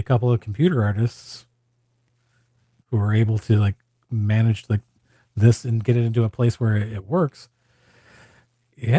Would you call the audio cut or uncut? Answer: uncut